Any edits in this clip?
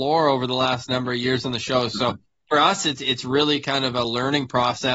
no; 0 cuts

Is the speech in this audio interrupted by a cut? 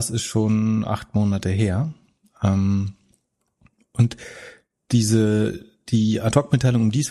no; 0 cuts

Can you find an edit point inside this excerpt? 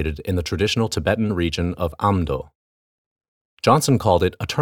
no; 0 cuts

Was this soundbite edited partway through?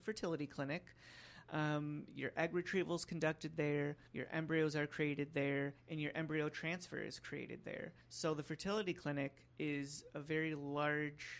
yes; 4 cuts; at 4.1 s, 5.8 s, 8.0 s, 9.5 s

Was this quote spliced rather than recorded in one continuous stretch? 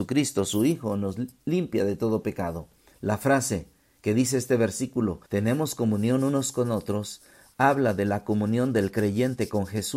yes; 2 cuts; at 2.9 s, 5.3 s

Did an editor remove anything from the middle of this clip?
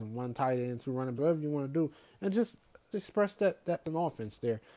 yes; 3 cuts; at 1.2 s, 2.9 s, 3.8 s

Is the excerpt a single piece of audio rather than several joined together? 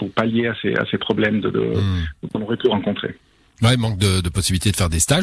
yes; 0 cuts

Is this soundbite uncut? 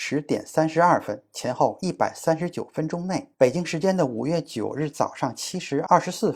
no; 1 cut; at 3.3 s

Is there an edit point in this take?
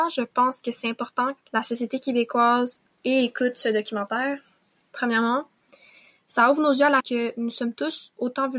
yes; 3 cuts; at 1.4 s, 3.0 s, 7.0 s

